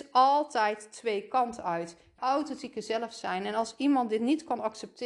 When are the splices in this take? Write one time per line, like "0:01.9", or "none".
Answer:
0:02.2